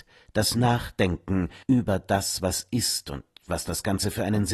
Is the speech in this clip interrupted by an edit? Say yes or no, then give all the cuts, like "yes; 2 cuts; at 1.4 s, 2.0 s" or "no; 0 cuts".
yes; 1 cut; at 1.6 s